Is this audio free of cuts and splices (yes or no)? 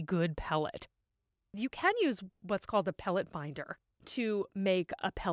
yes